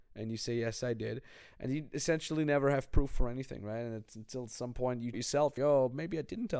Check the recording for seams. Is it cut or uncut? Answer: cut